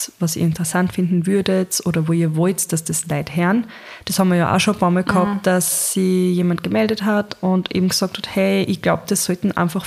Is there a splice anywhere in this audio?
no; 0 cuts

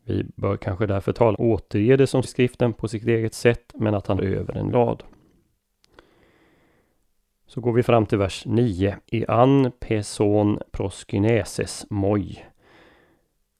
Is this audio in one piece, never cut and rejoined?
no; 6 cuts; at 1.3 s, 2.2 s, 4.2 s, 4.7 s, 9.0 s, 10.7 s

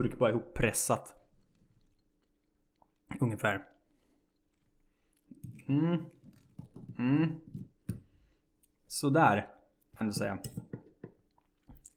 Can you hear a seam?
yes; 1 cut; at 10.0 s

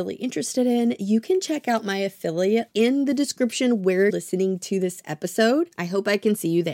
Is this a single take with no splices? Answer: no; 2 cuts; at 2.7 s, 4.1 s

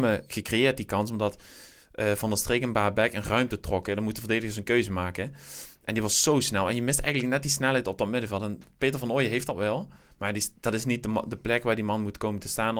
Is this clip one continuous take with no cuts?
yes; 0 cuts

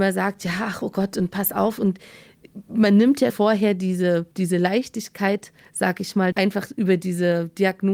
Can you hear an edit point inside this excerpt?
yes; 3 cuts; at 3.3 s, 4.3 s, 6.3 s

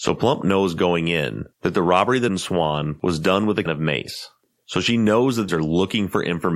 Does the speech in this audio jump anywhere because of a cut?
yes; 3 cuts; at 2.3 s, 3.7 s, 5.5 s

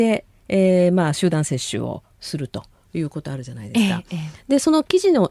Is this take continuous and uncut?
yes; 0 cuts

